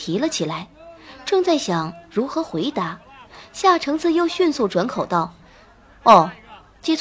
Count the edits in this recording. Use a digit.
0